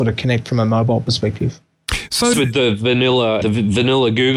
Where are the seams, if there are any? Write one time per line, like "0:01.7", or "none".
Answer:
0:02.3
0:03.4